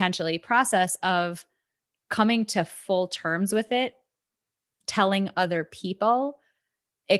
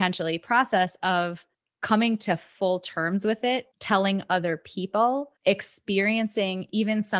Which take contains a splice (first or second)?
second